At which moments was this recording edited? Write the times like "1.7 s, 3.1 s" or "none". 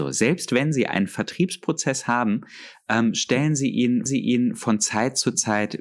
4.1 s